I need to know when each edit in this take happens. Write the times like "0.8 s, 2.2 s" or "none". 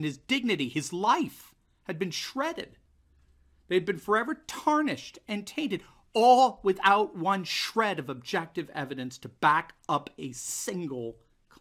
none

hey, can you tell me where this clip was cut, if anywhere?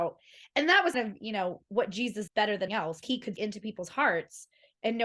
0.9 s, 2.3 s, 2.7 s, 3.0 s, 3.4 s

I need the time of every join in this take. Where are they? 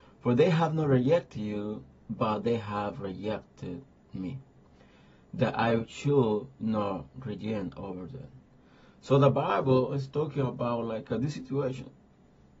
none

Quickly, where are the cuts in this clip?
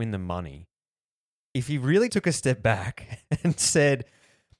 2.1 s

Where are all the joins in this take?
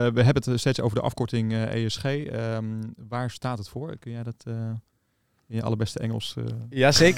none

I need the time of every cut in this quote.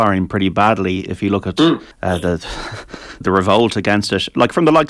1.9 s, 3.2 s

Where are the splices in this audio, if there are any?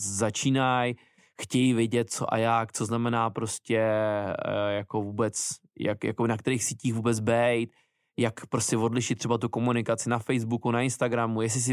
none

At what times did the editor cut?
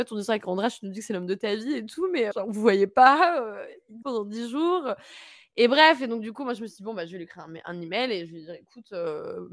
2.3 s, 4.0 s

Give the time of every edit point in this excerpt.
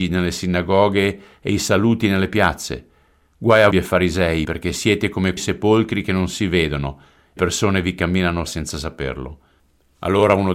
3.7 s, 4.4 s, 5.4 s, 7.4 s, 8.5 s

